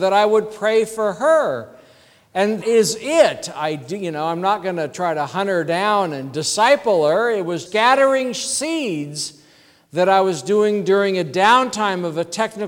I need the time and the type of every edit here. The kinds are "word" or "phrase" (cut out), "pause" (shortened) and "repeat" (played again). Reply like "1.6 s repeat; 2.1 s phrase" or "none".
2.6 s word; 7.7 s word